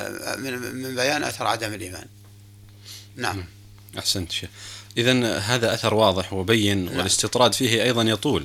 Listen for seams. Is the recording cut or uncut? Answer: uncut